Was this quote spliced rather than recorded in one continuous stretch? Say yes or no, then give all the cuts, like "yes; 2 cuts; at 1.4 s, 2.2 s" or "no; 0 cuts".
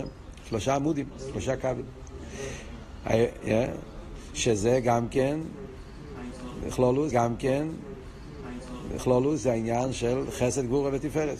yes; 1 cut; at 7.1 s